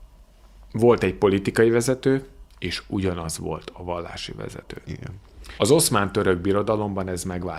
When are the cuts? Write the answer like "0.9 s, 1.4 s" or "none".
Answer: 2.5 s, 5.6 s